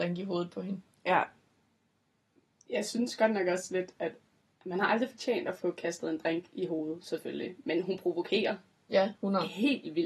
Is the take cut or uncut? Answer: uncut